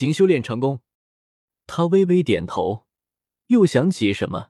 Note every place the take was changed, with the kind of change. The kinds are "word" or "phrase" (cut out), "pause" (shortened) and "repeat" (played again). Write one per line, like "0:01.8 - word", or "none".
0:00.9 - pause